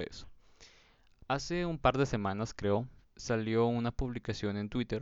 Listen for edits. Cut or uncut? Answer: cut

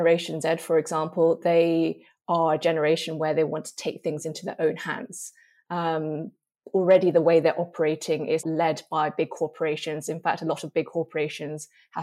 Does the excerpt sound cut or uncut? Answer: cut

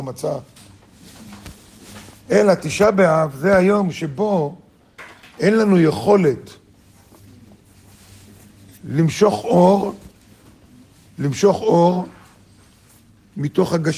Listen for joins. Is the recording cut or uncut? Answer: uncut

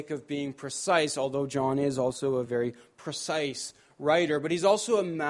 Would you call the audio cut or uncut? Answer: uncut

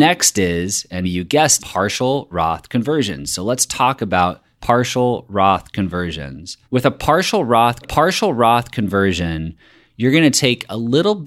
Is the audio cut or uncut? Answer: cut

